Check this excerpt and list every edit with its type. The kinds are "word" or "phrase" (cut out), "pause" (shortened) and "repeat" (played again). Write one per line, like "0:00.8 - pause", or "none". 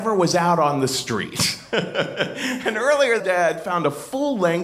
0:03.2 - word